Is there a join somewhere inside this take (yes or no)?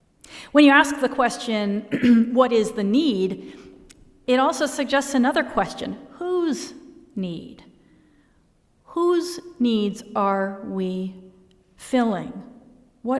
no